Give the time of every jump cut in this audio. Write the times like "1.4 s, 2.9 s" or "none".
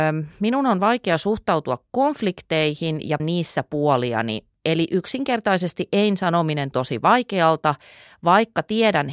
3.2 s, 6.7 s